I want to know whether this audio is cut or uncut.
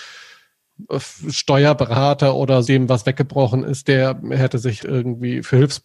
cut